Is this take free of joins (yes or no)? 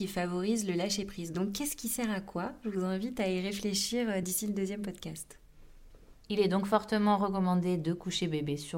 yes